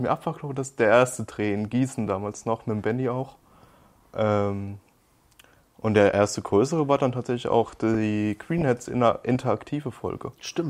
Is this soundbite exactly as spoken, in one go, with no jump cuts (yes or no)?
yes